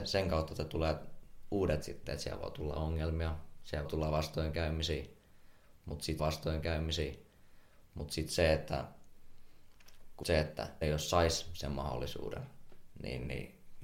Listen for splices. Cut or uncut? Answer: cut